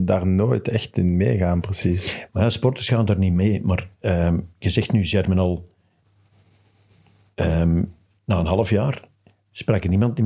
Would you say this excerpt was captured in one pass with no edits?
yes; 0 cuts

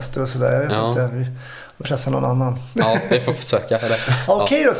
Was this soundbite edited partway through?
yes; 1 cut; at 1.8 s

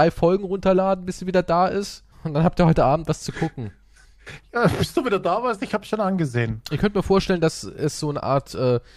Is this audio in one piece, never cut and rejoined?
no; 1 cut; at 2.1 s

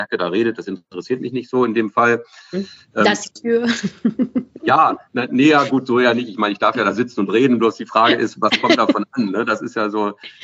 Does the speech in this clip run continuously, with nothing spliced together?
yes; 0 cuts

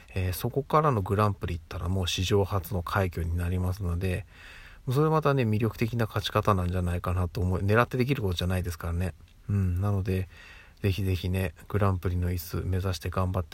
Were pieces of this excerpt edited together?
no; 0 cuts

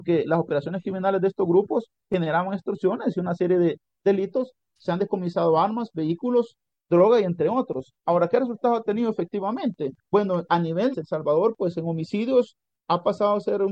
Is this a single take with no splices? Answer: no; 3 cuts; at 8.0 s, 10.0 s, 10.9 s

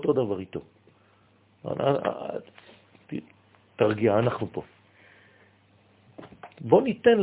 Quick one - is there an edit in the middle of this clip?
no; 0 cuts

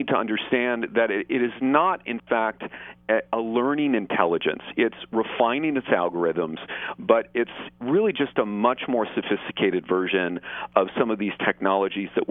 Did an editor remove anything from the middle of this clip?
no; 0 cuts

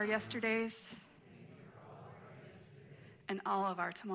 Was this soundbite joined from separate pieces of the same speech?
no; 0 cuts

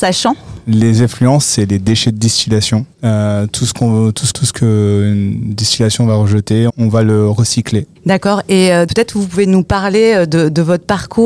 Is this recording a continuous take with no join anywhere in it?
no; 5 cuts; at 2.9 s, 4.3 s, 6.7 s, 8.0 s, 8.9 s

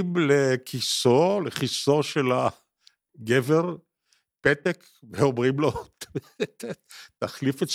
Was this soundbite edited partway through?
no; 0 cuts

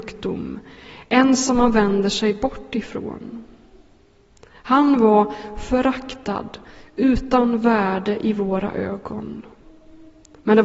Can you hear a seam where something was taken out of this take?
no; 0 cuts

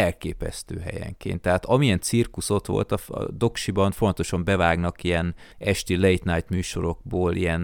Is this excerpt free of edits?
no; 1 cut; at 5.5 s

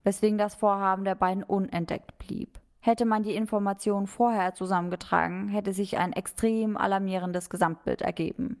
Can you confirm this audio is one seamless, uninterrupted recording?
no; 1 cut; at 2.7 s

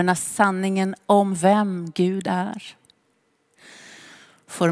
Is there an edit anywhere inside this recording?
no; 0 cuts

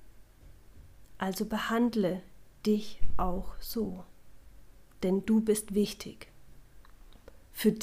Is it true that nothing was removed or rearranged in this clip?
yes; 0 cuts

